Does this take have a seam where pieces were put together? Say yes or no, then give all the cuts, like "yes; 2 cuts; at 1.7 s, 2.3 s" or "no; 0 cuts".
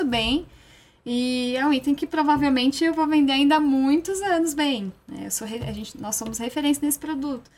no; 0 cuts